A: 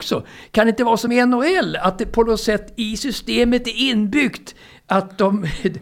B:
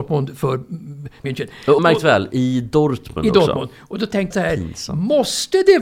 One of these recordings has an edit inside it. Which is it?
B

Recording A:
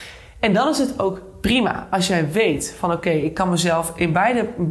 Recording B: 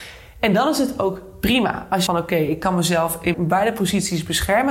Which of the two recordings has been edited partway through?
B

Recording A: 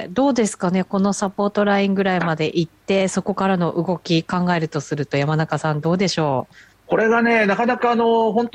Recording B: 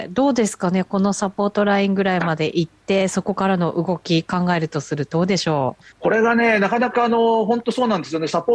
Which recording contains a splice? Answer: B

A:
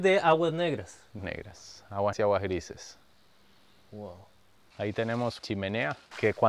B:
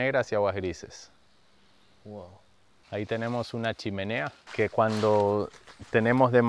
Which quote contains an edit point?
A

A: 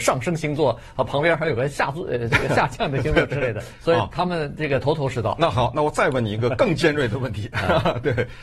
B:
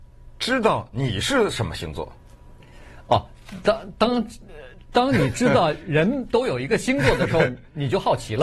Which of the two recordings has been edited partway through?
A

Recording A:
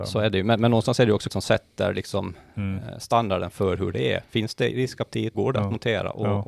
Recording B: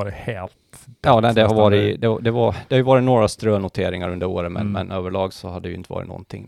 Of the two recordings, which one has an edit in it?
A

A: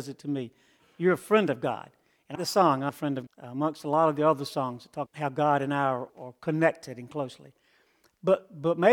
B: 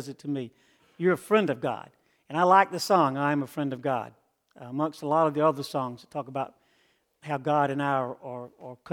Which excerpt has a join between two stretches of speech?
A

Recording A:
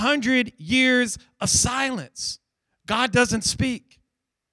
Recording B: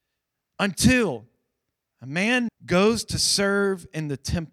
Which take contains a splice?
B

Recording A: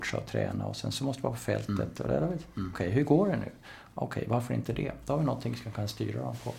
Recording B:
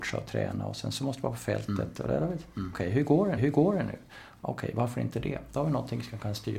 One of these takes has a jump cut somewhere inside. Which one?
B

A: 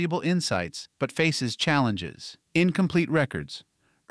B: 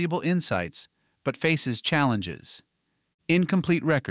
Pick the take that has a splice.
A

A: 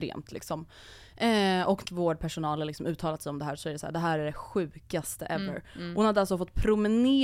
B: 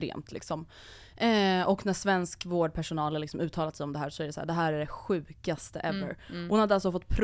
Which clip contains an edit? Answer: A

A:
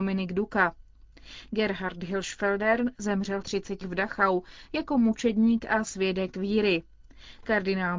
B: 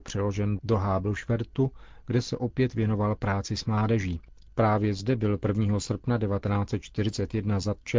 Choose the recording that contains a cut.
A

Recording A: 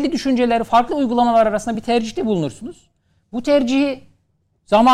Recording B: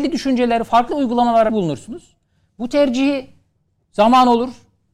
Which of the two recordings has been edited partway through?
B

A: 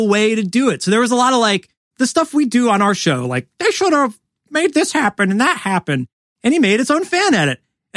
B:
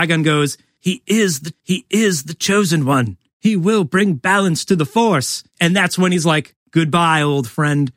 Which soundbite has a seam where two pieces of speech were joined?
B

